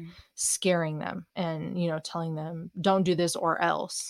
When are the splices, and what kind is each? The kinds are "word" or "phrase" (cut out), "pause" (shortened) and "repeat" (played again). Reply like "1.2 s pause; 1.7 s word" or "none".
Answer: 1.3 s pause